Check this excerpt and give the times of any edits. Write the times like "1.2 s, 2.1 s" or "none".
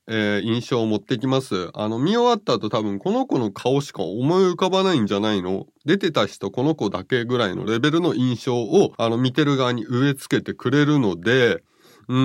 8.9 s